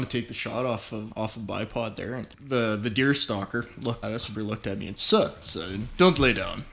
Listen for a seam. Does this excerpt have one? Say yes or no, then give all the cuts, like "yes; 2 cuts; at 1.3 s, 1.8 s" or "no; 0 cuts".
yes; 5 cuts; at 1.1 s, 2.3 s, 4.0 s, 4.3 s, 5.4 s